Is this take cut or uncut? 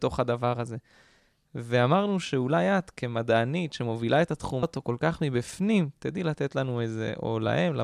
cut